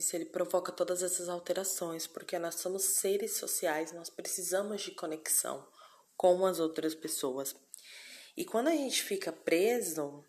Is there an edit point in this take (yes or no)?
no